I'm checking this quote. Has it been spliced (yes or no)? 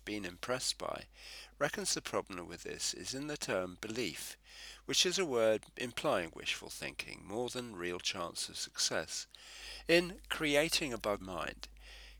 yes